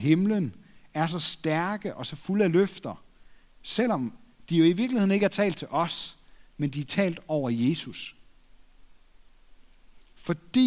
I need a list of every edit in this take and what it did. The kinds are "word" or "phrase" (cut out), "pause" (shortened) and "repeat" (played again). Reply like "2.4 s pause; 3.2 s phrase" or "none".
none